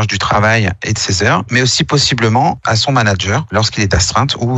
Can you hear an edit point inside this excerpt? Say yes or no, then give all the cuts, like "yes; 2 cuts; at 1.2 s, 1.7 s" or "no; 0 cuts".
no; 0 cuts